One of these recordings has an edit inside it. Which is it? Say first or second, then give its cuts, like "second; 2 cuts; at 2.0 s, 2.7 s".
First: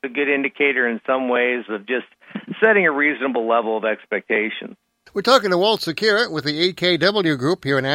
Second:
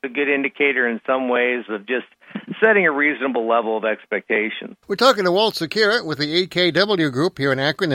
second; 1 cut; at 4.8 s